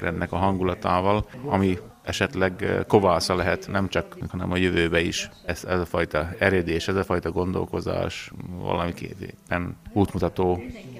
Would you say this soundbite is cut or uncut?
cut